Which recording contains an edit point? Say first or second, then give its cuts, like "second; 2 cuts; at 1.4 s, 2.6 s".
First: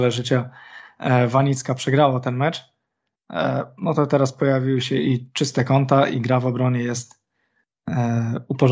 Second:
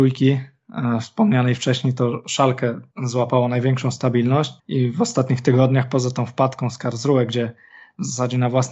second; 2 cuts; at 2.9 s, 4.6 s